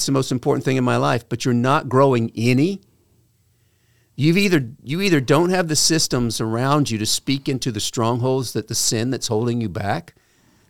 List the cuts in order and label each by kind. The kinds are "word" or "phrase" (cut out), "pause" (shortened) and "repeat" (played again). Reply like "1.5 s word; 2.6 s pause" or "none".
none